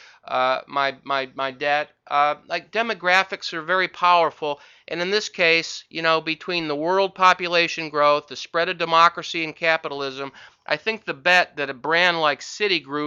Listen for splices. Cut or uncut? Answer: uncut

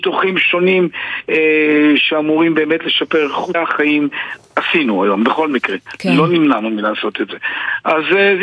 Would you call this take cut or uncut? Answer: cut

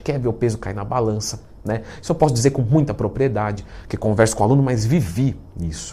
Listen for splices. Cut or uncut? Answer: uncut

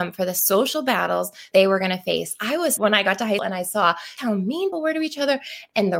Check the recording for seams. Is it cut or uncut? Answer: cut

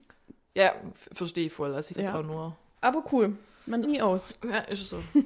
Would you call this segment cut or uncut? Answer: cut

